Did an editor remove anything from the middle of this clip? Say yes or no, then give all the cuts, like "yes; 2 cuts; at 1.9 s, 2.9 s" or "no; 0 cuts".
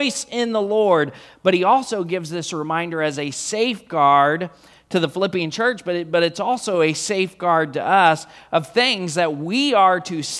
no; 0 cuts